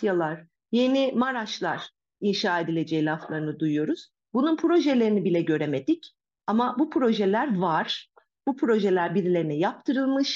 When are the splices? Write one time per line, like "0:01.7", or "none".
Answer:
none